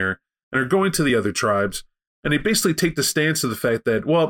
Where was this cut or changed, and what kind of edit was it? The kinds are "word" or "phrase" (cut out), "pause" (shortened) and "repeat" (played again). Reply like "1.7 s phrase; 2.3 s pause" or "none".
none